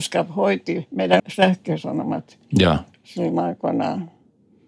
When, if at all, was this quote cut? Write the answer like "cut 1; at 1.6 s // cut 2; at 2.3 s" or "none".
cut 1; at 1.2 s